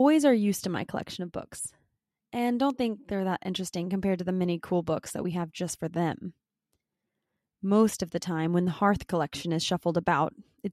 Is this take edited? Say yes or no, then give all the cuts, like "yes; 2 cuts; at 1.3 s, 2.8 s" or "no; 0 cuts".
no; 0 cuts